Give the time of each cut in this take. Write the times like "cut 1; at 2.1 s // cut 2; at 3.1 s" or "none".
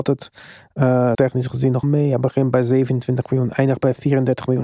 cut 1; at 1.1 s // cut 2; at 1.8 s